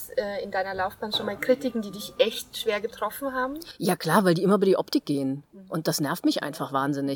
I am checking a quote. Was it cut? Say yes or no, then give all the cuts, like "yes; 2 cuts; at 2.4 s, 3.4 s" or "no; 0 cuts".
no; 0 cuts